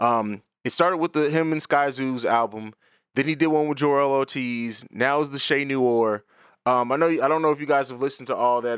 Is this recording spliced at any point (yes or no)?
no